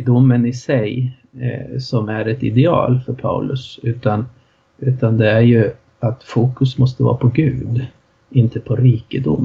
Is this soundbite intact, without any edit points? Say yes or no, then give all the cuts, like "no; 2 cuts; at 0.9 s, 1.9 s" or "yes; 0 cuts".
yes; 0 cuts